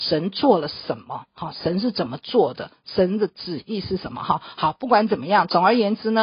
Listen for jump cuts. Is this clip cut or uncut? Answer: uncut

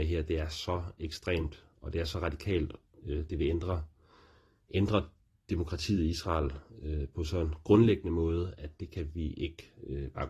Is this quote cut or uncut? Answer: uncut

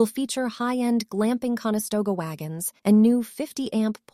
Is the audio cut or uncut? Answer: cut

